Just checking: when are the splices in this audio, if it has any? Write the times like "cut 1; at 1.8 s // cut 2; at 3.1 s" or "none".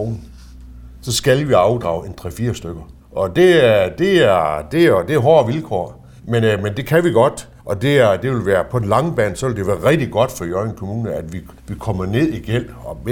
cut 1; at 3.0 s // cut 2; at 6.2 s // cut 3; at 7.6 s // cut 4; at 11.6 s

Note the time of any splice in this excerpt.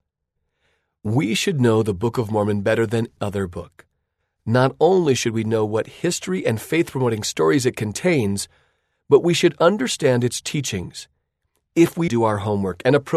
cut 1; at 3.2 s // cut 2; at 12.1 s

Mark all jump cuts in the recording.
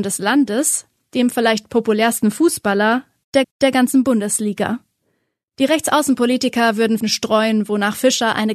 cut 1; at 3.4 s // cut 2; at 7.0 s

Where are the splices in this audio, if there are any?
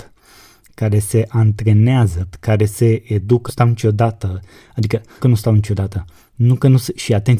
cut 1; at 2.3 s // cut 2; at 3.5 s // cut 3; at 5.2 s

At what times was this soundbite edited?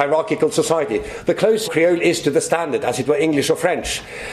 cut 1; at 1.6 s

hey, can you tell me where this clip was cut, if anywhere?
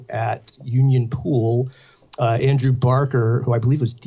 none

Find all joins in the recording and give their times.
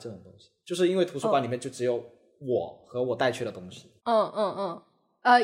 cut 1; at 4.0 s

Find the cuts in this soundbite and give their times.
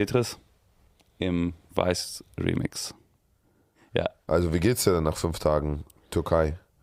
none

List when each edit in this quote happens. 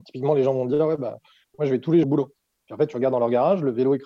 cut 1; at 2.0 s

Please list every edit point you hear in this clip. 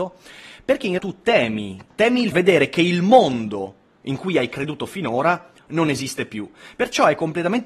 cut 1; at 1.0 s // cut 2; at 1.9 s // cut 3; at 2.3 s

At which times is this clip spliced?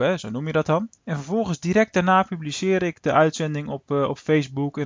cut 1; at 1.0 s

